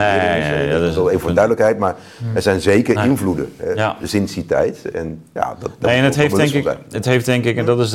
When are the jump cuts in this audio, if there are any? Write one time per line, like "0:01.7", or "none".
none